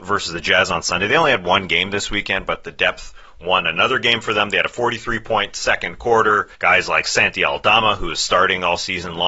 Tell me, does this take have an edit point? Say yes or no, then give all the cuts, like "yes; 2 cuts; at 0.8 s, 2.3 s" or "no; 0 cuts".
yes; 1 cut; at 6.5 s